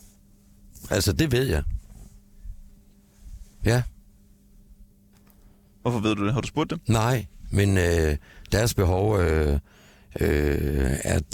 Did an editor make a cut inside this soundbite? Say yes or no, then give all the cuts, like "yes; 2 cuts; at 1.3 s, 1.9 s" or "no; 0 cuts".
yes; 1 cut; at 3.5 s